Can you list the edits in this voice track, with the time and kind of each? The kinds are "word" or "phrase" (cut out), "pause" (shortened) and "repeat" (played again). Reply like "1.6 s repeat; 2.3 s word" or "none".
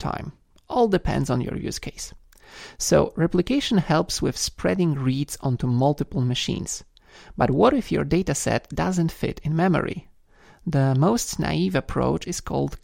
none